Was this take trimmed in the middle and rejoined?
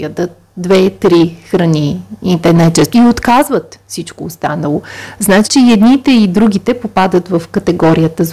yes; 2 cuts; at 2.9 s, 5.4 s

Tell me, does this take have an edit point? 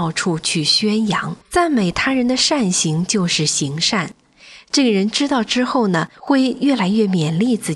yes; 2 cuts; at 1.4 s, 6.1 s

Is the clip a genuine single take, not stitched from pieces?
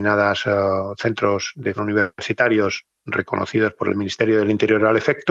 no; 1 cut; at 1.8 s

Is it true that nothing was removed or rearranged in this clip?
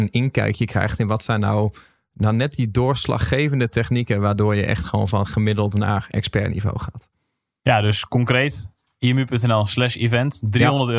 yes; 0 cuts

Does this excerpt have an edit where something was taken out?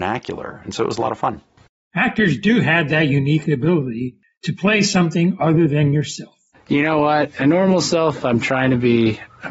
yes; 1 cut; at 7.4 s

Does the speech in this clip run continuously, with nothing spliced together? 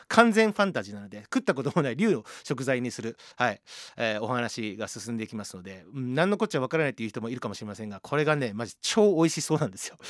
yes; 0 cuts

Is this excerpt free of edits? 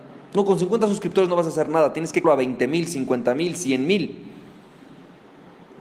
no; 1 cut; at 2.2 s

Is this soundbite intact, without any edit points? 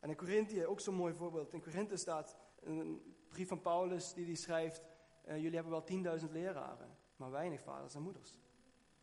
no; 2 cuts; at 2.5 s, 7.1 s

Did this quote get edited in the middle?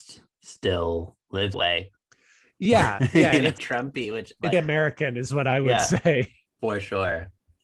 yes; 3 cuts; at 1.5 s, 3.6 s, 4.5 s

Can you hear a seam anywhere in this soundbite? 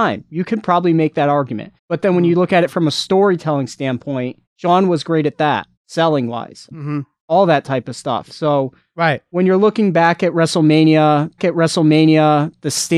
yes; 5 cuts; at 1.8 s, 4.5 s, 5.8 s, 6.7 s, 11.4 s

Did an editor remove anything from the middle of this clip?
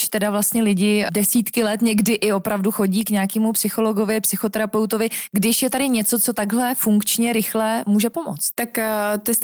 no; 0 cuts

